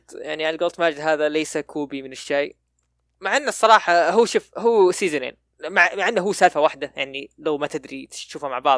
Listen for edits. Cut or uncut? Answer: uncut